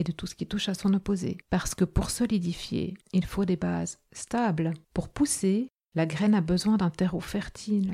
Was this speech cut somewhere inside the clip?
yes; 3 cuts; at 1.4 s, 3.0 s, 4.8 s

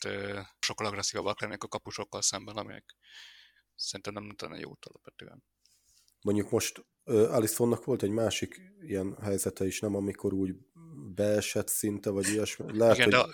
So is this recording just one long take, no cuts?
yes; 0 cuts

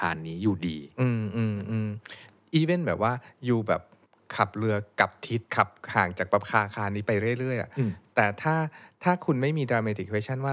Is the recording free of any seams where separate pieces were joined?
no; 1 cut; at 5.5 s

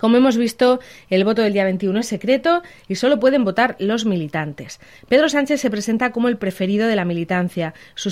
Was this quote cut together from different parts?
no; 0 cuts

